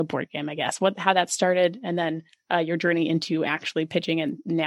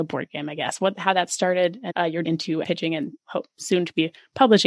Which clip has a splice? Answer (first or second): second